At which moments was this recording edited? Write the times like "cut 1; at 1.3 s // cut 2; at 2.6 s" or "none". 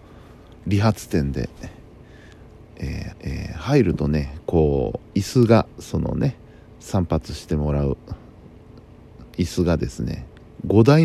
cut 1; at 3.1 s // cut 2; at 5.1 s // cut 3; at 5.7 s // cut 4; at 6.5 s // cut 5; at 9.3 s